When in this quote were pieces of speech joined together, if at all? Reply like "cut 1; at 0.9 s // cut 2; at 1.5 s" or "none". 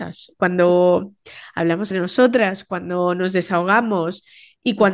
cut 1; at 1.9 s